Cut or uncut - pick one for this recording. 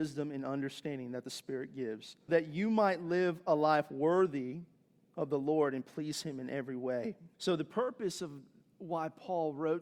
cut